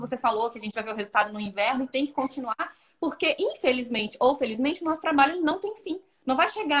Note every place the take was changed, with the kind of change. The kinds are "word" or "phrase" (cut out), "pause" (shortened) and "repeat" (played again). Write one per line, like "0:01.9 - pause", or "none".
none